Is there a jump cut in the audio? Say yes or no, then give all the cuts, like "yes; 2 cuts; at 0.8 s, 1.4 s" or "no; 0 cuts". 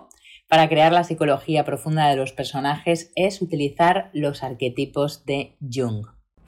no; 0 cuts